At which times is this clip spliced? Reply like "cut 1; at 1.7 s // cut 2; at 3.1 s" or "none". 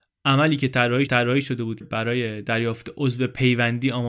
cut 1; at 1.1 s // cut 2; at 1.8 s